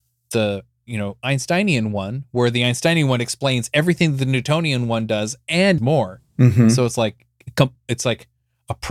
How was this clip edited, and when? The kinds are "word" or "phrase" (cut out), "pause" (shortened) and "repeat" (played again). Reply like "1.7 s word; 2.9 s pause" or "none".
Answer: 5.8 s word